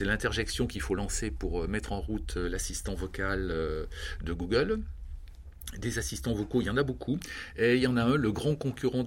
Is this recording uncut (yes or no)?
yes